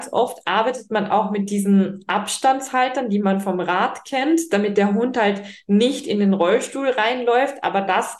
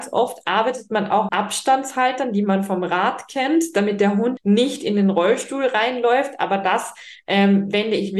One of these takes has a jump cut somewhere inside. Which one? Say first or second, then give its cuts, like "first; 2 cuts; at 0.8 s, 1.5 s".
second; 2 cuts; at 1.3 s, 4.4 s